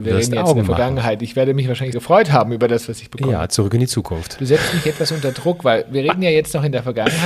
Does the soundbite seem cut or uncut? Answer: cut